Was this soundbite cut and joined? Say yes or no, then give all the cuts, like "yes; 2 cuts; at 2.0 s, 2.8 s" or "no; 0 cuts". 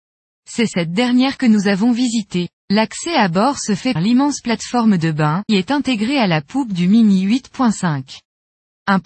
yes; 3 cuts; at 2.6 s, 4.0 s, 5.5 s